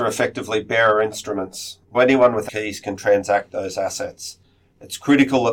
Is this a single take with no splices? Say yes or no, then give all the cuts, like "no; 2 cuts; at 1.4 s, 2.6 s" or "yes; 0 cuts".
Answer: no; 2 cuts; at 1.9 s, 2.5 s